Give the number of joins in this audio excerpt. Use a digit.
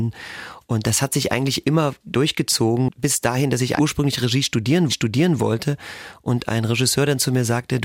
2